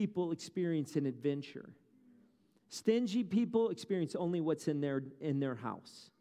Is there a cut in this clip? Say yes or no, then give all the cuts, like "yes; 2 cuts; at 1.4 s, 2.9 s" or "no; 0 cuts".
no; 0 cuts